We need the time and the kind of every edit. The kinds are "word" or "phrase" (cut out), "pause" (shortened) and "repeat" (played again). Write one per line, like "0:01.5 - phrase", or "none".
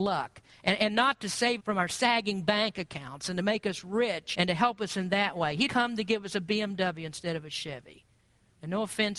0:01.6 - word
0:04.3 - word
0:05.7 - word